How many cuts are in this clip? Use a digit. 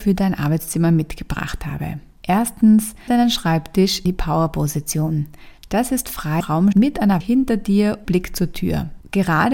6